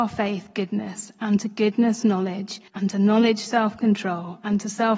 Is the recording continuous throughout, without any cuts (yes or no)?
no